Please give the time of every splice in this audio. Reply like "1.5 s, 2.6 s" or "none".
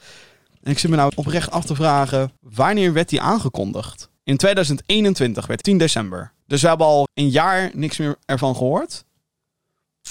1.1 s, 2.4 s, 4.2 s, 5.6 s, 6.4 s, 7.1 s